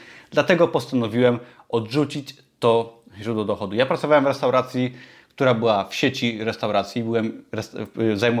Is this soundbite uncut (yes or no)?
yes